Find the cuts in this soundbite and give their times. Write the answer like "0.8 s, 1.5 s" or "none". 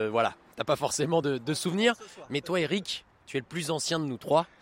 none